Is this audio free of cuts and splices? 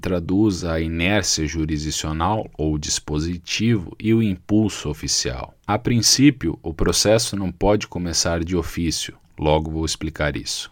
no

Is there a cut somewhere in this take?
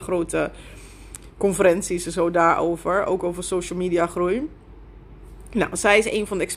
no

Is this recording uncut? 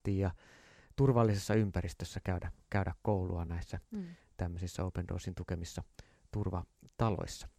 yes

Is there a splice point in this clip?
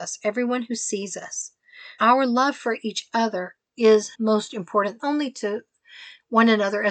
yes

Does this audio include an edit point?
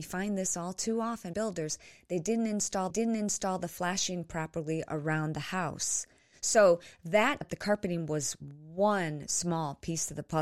yes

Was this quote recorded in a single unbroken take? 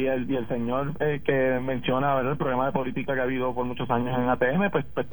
yes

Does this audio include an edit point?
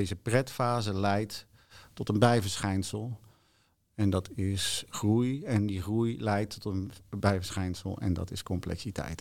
no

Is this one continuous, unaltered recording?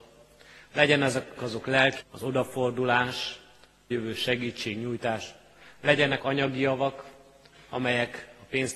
no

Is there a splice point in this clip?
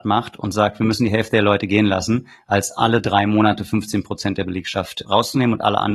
yes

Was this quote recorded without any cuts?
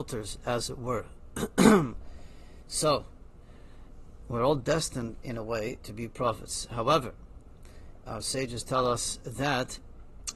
no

